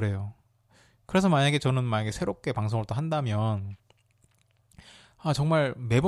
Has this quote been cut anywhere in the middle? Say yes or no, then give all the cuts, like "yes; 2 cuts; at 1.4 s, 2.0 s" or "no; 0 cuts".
no; 0 cuts